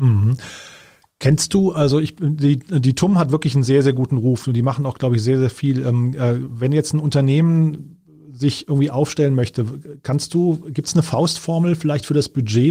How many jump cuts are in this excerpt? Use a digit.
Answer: 0